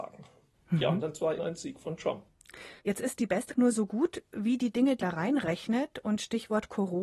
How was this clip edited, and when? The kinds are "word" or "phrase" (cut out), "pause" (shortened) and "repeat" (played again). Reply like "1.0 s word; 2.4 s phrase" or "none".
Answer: 1.4 s word; 2.8 s pause; 3.5 s word; 5.0 s word